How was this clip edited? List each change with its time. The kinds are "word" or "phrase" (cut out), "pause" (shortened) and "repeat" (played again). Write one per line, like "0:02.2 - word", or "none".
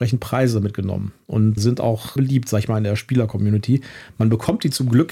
0:01.6 - word
0:02.2 - word